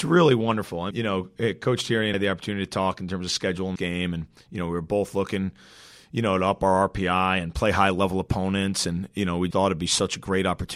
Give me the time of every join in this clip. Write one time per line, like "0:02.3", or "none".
0:00.9
0:02.1
0:03.8
0:09.5